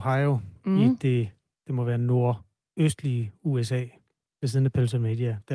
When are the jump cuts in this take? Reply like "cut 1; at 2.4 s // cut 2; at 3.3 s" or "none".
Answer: none

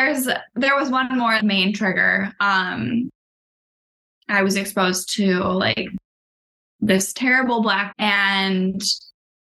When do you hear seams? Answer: cut 1; at 1.4 s // cut 2; at 7.9 s

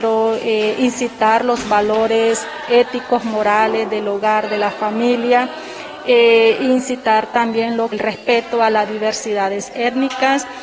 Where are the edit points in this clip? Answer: cut 1; at 7.9 s

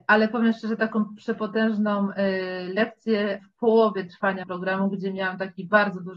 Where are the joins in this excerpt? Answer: cut 1; at 3.4 s // cut 2; at 4.4 s

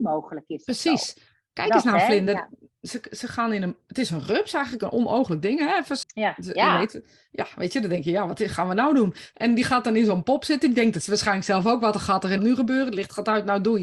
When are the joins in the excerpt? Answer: cut 1; at 6.0 s // cut 2; at 12.4 s

